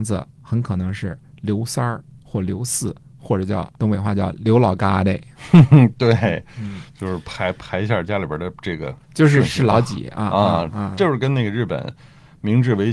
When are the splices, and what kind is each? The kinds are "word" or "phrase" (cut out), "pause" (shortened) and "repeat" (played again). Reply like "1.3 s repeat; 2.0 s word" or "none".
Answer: 3.8 s pause; 9.0 s pause